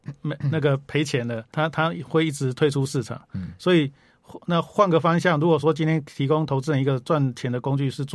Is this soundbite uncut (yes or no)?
no